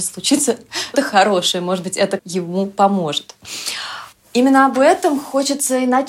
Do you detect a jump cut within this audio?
yes; 2 cuts; at 0.9 s, 2.2 s

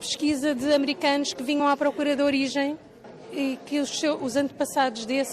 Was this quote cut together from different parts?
no; 0 cuts

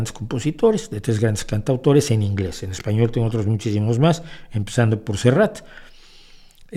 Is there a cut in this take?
no; 0 cuts

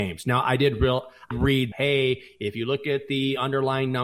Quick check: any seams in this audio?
yes; 2 cuts; at 1.3 s, 1.7 s

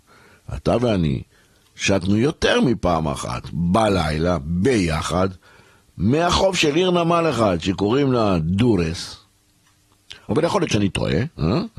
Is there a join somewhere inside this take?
no; 0 cuts

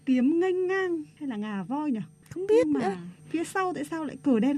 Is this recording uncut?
yes; 0 cuts

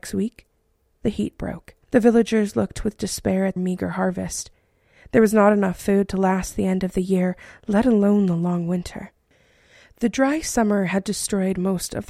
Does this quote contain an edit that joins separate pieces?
yes; 2 cuts; at 1.8 s, 3.6 s

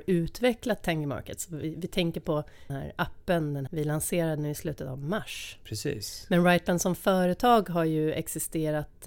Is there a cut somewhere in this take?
yes; 2 cuts; at 2.7 s, 3.7 s

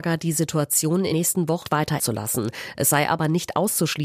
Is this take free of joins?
no; 3 cuts; at 1.1 s, 1.6 s, 2.0 s

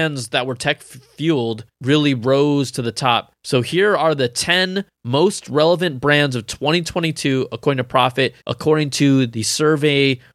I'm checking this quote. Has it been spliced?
yes; 4 cuts; at 1.7 s, 3.4 s, 4.9 s, 8.4 s

